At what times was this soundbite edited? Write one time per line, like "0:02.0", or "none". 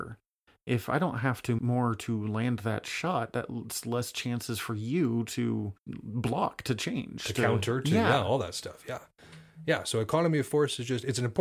0:01.6
0:05.8